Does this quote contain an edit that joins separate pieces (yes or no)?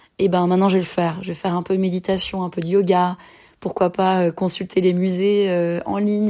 no